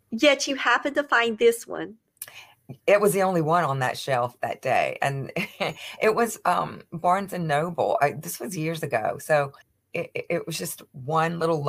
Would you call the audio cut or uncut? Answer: cut